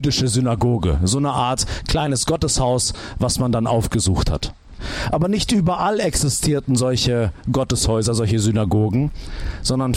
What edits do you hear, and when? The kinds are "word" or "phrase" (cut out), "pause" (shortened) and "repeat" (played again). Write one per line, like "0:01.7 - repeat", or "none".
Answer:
none

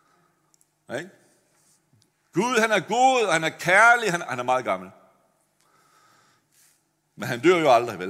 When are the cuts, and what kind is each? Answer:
none

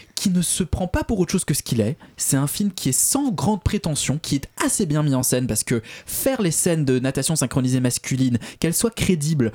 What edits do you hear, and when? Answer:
none

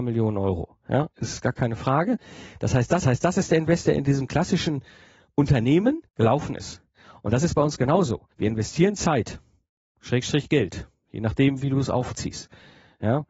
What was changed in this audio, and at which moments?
0:03.0 - repeat
0:06.1 - pause
0:08.3 - pause

